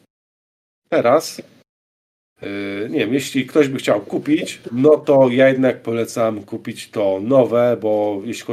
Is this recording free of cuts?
yes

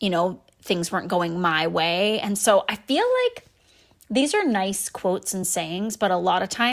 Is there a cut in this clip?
no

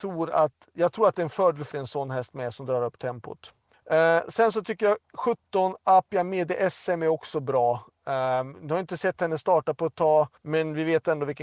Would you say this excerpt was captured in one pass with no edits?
no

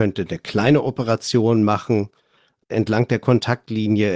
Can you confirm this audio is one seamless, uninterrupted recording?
yes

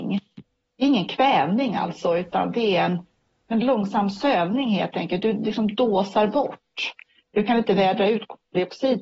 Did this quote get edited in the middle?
no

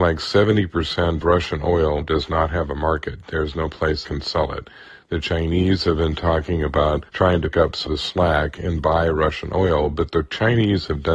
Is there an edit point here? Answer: yes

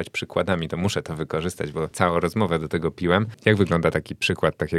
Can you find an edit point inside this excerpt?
no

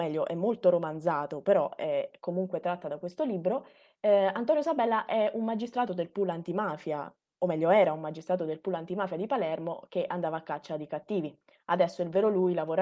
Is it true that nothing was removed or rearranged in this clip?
yes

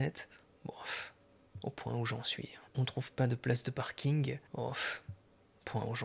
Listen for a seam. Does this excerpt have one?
yes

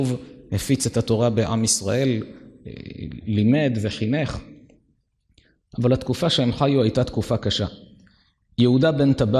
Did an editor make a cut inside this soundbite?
no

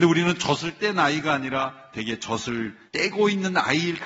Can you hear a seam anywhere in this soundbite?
yes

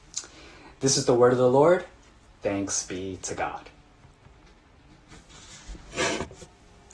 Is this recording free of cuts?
yes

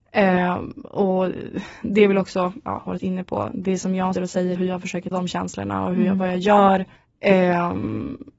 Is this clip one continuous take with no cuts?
no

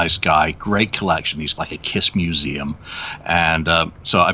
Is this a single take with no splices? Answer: no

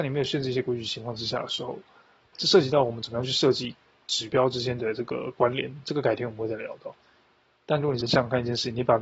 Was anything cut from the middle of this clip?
yes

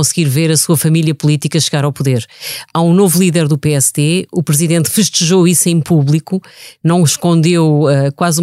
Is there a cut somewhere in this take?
no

